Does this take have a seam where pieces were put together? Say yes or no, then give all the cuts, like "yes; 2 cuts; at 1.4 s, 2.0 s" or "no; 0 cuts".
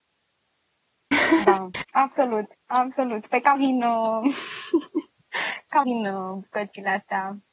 yes; 3 cuts; at 2.5 s, 3.5 s, 5.8 s